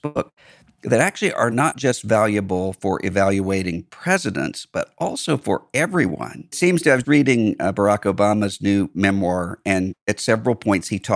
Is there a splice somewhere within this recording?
yes; 2 cuts; at 6.5 s, 7.0 s

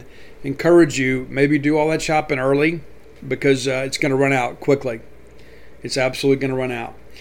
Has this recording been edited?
no; 0 cuts

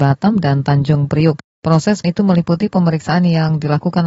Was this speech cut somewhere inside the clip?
yes; 1 cut; at 2.0 s

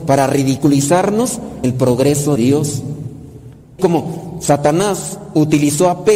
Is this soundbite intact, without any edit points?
no; 3 cuts; at 1.6 s, 2.4 s, 3.8 s

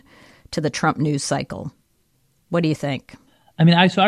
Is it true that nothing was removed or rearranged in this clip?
yes; 0 cuts

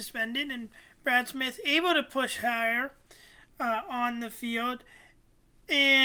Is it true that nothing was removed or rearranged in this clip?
yes; 0 cuts

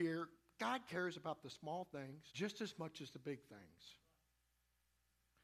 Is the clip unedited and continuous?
no; 1 cut; at 2.3 s

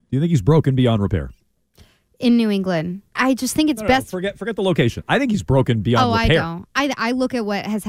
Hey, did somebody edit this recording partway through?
yes; 1 cut; at 3.2 s

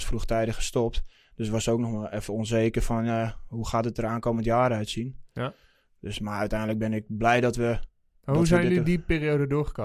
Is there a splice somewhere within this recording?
no; 0 cuts

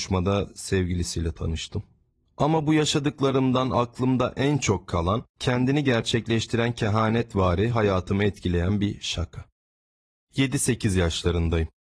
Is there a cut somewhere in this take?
no; 0 cuts

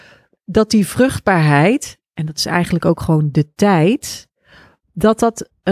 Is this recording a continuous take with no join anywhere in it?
yes; 0 cuts

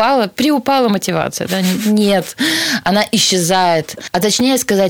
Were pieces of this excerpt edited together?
no; 0 cuts

